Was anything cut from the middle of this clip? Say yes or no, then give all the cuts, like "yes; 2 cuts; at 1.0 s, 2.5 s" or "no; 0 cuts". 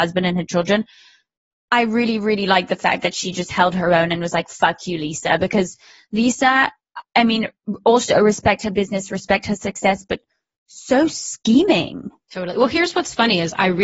no; 0 cuts